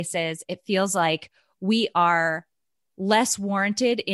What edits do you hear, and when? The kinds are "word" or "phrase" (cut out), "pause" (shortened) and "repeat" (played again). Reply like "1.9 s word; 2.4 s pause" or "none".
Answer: none